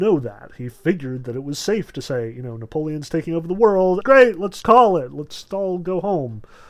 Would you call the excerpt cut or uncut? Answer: cut